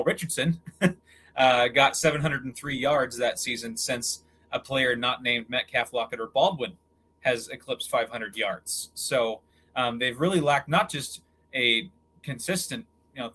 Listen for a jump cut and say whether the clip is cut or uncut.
uncut